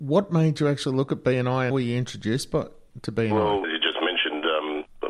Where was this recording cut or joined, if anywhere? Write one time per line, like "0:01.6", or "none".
0:01.7
0:03.6

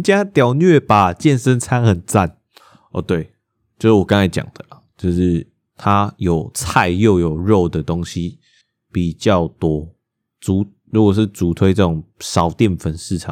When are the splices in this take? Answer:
none

